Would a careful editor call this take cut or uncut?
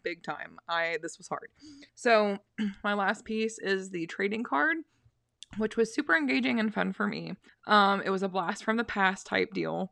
cut